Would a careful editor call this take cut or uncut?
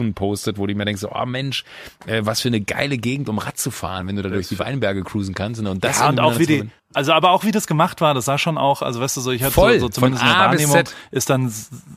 cut